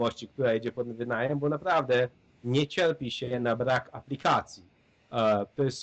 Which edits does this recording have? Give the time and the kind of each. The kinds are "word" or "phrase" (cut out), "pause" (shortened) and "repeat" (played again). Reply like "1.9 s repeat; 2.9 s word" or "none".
none